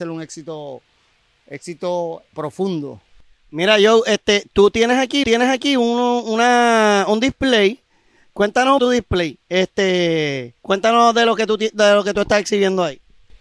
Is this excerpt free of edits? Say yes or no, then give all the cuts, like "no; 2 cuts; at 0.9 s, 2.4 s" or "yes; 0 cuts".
no; 4 cuts; at 2.3 s, 5.2 s, 8.8 s, 10.6 s